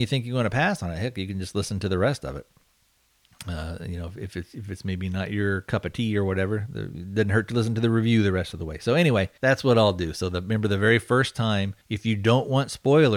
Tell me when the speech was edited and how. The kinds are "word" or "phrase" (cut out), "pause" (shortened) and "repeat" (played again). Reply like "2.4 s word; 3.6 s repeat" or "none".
9.4 s pause; 11.8 s pause